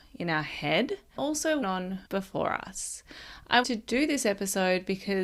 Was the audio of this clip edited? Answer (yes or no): yes